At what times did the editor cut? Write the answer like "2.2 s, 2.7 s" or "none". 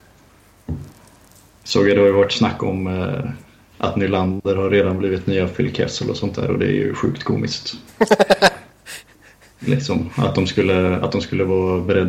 none